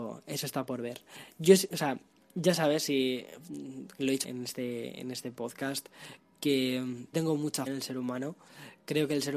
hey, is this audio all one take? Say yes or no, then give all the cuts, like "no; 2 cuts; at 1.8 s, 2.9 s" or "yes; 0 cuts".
no; 5 cuts; at 1.7 s, 2.1 s, 4.2 s, 7.1 s, 7.7 s